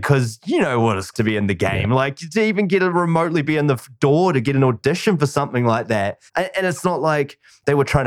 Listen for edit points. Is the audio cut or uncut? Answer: cut